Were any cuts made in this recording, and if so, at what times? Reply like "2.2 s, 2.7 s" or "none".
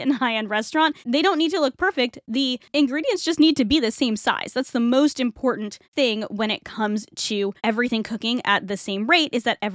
1.0 s, 5.8 s, 7.6 s